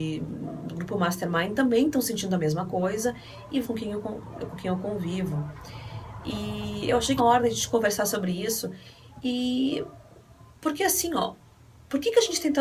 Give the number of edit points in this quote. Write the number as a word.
three